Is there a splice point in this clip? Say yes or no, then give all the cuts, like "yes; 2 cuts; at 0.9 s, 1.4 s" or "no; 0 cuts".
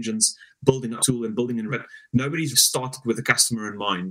yes; 3 cuts; at 1.0 s, 1.7 s, 2.5 s